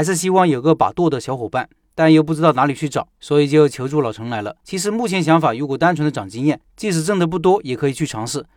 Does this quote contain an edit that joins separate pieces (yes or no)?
yes